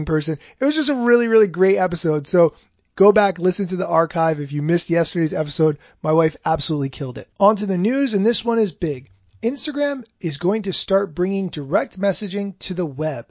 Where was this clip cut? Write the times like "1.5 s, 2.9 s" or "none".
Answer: 7.3 s